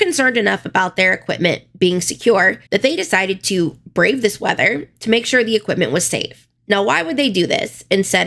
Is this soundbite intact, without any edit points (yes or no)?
no